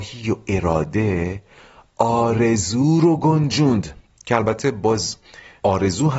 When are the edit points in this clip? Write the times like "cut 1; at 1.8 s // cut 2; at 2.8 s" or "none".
none